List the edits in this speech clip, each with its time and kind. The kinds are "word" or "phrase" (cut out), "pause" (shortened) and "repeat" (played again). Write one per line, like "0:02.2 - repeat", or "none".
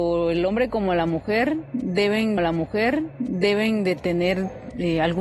0:02.4 - repeat